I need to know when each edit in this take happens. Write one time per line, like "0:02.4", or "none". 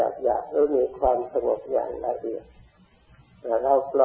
none